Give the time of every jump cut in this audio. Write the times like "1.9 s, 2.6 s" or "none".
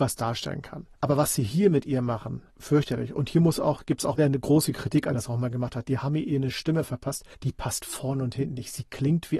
0.9 s, 2.5 s, 4.2 s, 5.1 s, 7.3 s